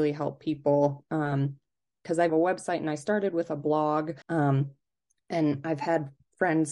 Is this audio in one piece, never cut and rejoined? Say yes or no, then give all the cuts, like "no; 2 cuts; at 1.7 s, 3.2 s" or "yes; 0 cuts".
no; 2 cuts; at 2.3 s, 4.2 s